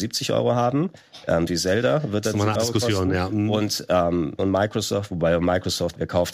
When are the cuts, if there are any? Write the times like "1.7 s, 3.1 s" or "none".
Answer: 1.5 s, 2.5 s, 4.4 s

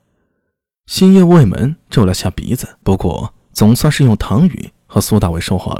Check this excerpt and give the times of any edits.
2.8 s

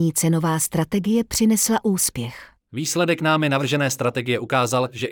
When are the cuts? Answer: 2.6 s

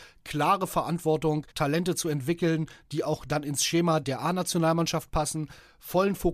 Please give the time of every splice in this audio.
1.5 s, 4.0 s

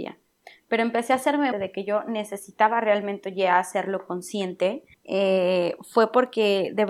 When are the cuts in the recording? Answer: 1.5 s, 4.9 s

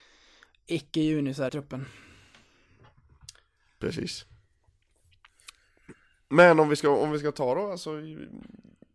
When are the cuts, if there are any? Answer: 1.5 s

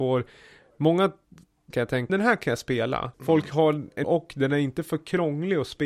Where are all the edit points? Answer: 1.7 s, 2.1 s, 3.1 s, 4.0 s

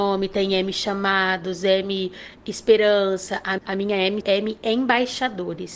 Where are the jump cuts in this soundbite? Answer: 3.6 s, 4.2 s

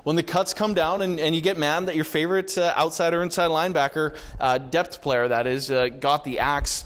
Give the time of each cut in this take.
none

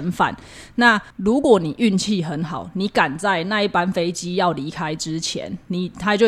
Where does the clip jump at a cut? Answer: 1.1 s

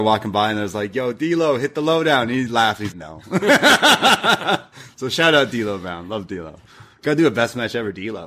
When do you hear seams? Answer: 2.9 s

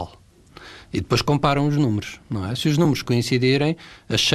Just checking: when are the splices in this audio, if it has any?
none

